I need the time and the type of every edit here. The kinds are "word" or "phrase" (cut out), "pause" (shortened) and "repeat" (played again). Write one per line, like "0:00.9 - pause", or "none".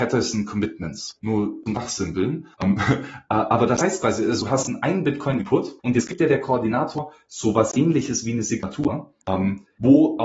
0:01.2 - pause
0:02.5 - pause
0:05.8 - pause
0:09.2 - pause